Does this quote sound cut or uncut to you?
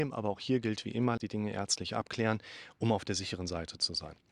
cut